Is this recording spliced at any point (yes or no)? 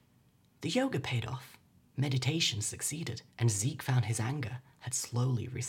yes